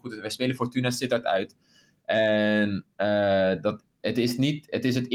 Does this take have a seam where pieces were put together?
no; 0 cuts

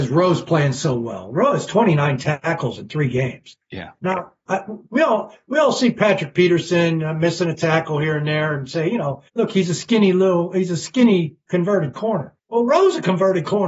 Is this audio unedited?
no; 3 cuts; at 3.6 s, 9.3 s, 12.4 s

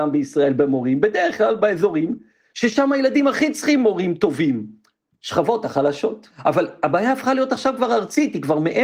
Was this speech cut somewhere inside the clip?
no; 0 cuts

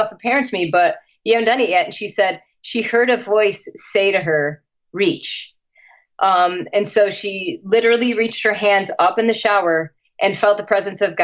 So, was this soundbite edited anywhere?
no; 0 cuts

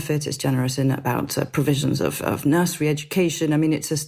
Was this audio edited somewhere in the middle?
no; 0 cuts

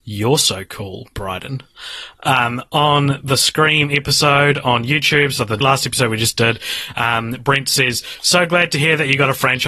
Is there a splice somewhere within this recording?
yes; 1 cut; at 5.6 s

